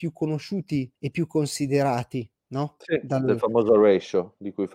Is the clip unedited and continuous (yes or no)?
no